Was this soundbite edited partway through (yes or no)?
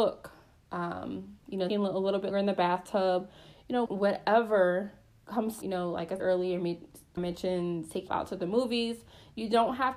yes